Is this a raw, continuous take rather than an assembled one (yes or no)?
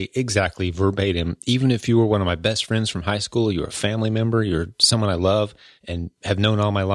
yes